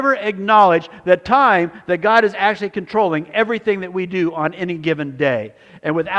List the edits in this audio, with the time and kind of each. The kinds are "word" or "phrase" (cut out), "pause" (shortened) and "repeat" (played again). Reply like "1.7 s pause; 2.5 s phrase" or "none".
none